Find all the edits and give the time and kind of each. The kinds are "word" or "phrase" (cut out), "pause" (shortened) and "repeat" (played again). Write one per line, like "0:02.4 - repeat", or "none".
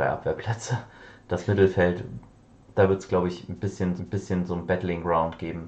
0:04.0 - repeat